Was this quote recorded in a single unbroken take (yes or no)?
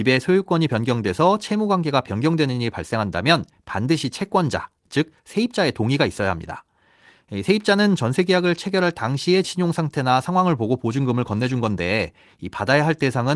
no